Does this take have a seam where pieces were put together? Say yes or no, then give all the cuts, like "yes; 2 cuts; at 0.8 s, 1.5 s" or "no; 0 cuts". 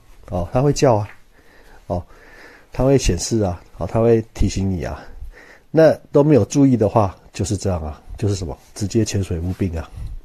no; 0 cuts